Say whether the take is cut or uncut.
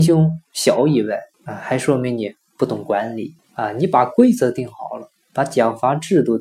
cut